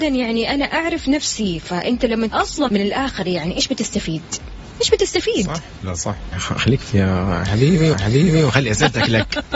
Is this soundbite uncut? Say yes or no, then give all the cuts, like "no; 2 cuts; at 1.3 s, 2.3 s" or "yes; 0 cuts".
no; 6 cuts; at 2.3 s, 2.7 s, 5.8 s, 6.3 s, 6.9 s, 7.9 s